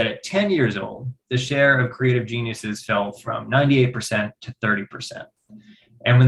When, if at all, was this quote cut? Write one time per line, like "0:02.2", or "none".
none